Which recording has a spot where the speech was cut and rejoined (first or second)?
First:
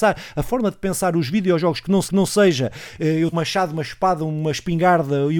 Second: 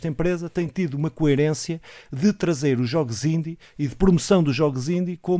first